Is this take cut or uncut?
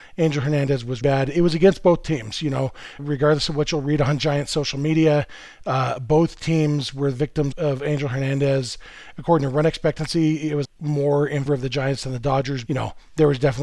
cut